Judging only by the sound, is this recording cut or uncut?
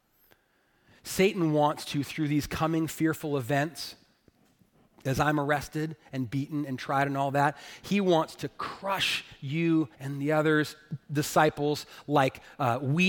cut